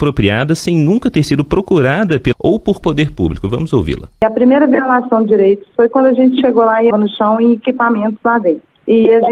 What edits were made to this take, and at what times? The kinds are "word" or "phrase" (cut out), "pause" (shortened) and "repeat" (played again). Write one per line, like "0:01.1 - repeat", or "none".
0:02.3 - word
0:02.8 - phrase
0:06.9 - phrase